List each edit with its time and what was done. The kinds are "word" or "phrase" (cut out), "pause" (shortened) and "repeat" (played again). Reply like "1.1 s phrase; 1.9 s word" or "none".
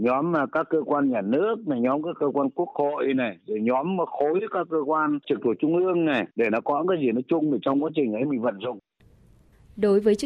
5.2 s pause; 6.3 s pause